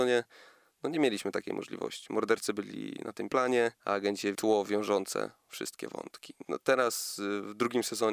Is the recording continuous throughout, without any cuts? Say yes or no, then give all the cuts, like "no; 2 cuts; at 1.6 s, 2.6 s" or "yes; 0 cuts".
no; 3 cuts; at 3.3 s, 3.8 s, 4.4 s